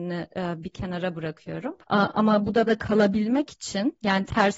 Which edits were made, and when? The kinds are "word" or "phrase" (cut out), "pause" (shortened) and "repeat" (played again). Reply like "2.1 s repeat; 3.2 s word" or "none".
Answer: 1.8 s pause; 2.7 s word